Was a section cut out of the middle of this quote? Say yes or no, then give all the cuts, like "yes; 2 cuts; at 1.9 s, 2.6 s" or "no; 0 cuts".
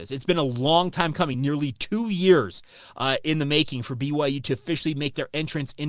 no; 0 cuts